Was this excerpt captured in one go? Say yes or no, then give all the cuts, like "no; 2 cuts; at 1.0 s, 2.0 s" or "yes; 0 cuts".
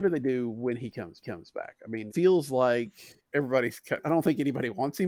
no; 4 cuts; at 1.2 s, 2.1 s, 3.3 s, 4.0 s